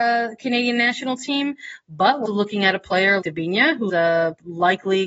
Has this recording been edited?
yes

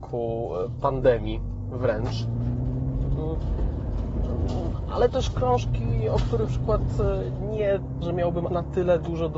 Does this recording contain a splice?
yes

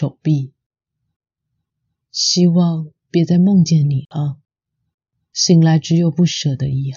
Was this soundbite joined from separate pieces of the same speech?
no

